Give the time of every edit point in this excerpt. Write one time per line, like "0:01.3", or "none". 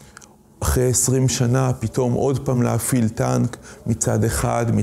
none